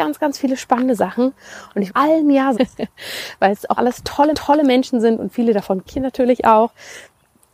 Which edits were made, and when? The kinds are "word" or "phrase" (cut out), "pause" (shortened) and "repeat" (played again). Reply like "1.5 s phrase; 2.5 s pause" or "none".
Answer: 1.9 s phrase; 2.5 s word; 3.8 s word; 4.3 s repeat; 5.9 s word

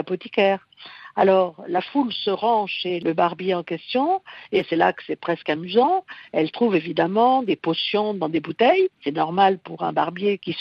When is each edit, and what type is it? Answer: 8.9 s pause

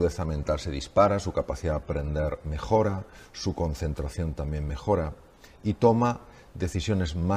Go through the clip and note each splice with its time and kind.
none

